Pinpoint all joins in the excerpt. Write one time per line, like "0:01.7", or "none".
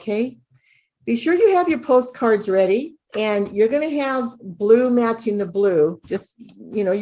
0:03.1

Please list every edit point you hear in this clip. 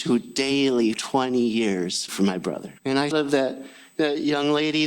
0:00.9
0:02.1
0:02.8
0:03.1

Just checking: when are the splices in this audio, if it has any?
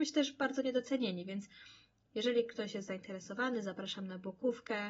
none

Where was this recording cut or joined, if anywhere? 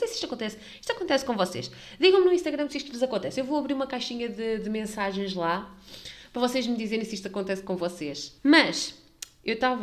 0:08.4

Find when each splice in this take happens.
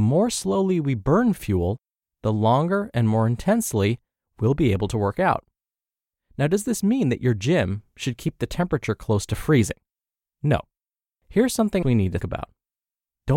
0:11.8
0:12.2

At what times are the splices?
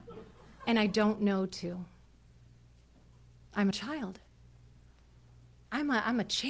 0:03.7

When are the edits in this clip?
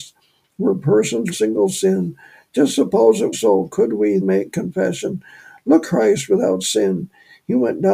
0:01.3
0:03.3
0:04.2
0:05.8

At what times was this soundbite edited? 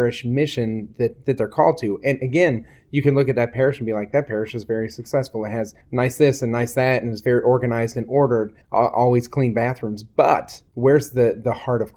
0:05.8
0:08.6
0:10.7

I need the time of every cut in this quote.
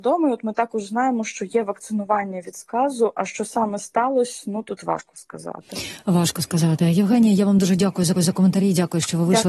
0:08.2

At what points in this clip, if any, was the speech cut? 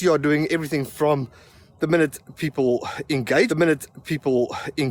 0:03.5

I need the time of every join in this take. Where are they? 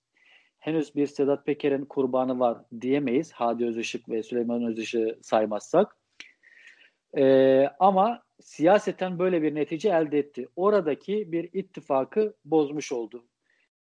none

